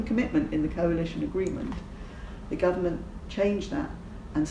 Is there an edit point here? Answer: yes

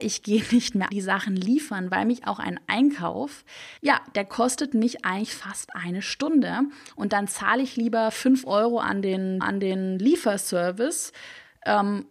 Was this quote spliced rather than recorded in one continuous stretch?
yes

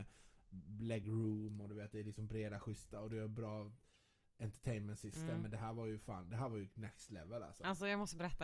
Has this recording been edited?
no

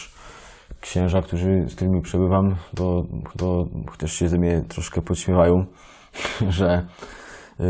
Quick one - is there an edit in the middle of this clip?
yes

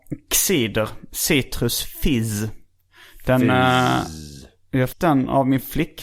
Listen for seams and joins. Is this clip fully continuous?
no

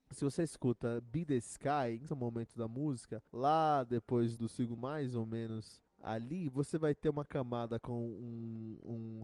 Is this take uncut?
no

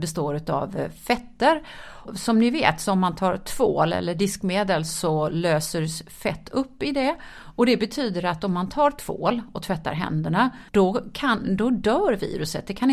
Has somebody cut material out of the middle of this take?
yes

